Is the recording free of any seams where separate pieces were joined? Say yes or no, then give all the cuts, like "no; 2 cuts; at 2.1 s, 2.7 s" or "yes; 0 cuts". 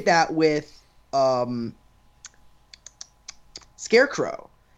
yes; 0 cuts